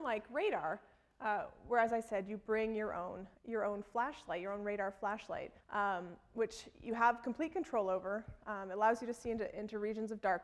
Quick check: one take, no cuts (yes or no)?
no